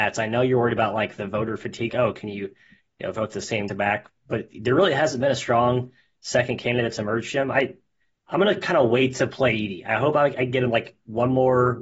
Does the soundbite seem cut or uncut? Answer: cut